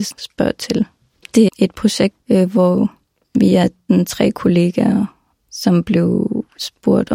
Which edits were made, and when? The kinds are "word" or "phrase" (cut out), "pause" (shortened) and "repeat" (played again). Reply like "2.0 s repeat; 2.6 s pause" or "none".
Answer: 1.5 s word